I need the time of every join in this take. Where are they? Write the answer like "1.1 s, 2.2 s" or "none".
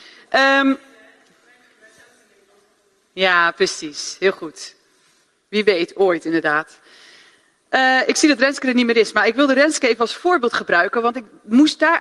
none